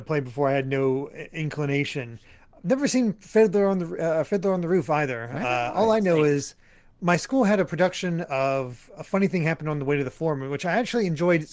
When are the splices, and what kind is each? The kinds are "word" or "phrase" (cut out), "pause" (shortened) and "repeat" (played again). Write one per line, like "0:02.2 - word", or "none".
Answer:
none